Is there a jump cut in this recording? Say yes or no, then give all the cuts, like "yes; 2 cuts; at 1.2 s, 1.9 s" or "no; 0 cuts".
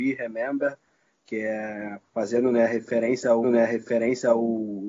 yes; 2 cuts; at 2.1 s, 3.4 s